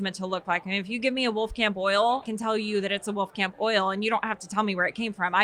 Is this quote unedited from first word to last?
no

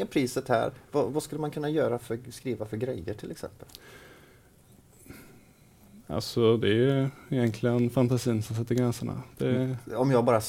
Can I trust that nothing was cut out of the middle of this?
yes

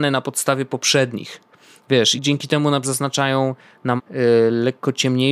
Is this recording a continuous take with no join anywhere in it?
no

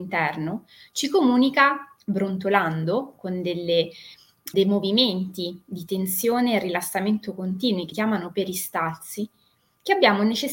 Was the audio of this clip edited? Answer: yes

